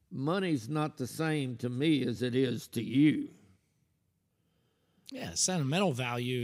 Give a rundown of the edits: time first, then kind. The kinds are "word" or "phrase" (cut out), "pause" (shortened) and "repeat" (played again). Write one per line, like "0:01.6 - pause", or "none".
none